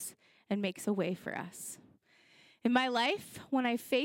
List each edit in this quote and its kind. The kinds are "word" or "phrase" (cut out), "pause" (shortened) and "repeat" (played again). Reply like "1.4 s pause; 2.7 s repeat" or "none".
none

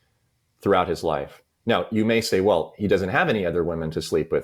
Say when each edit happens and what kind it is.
none

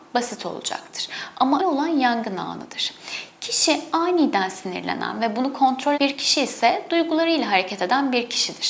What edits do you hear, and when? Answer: 1.6 s word; 5.9 s word

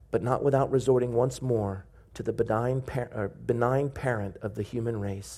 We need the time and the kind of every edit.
none

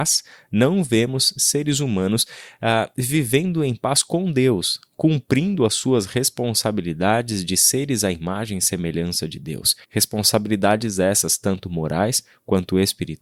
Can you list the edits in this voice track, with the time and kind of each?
9.8 s pause

